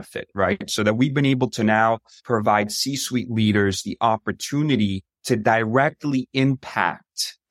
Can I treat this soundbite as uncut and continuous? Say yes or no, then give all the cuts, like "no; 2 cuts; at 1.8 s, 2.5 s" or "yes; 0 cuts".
yes; 0 cuts